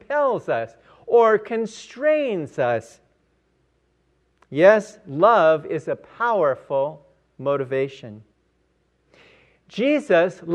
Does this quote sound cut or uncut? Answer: uncut